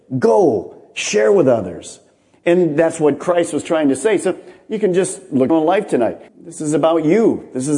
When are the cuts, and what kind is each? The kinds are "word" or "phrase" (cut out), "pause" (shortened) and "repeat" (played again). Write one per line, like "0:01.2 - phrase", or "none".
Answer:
0:05.5 - phrase
0:06.3 - pause